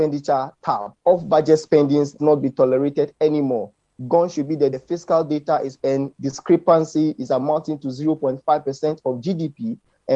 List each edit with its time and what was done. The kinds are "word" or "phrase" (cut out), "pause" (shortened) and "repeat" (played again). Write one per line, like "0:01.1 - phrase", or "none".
0:01.0 - pause
0:02.2 - word
0:04.7 - phrase
0:05.8 - word